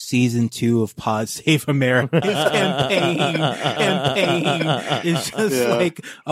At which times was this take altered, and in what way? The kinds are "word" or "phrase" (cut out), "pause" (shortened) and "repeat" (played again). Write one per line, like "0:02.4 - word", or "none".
0:02.2 - word
0:03.8 - repeat